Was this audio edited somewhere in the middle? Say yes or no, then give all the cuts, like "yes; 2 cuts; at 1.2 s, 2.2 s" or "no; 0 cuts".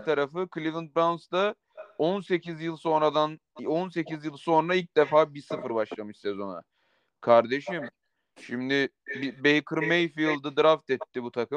no; 0 cuts